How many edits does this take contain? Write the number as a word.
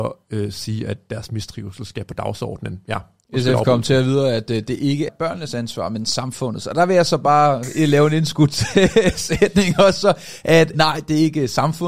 two